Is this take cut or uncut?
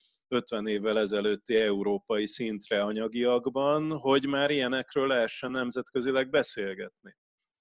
uncut